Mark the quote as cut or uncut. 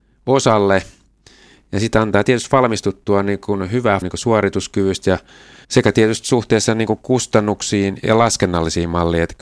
cut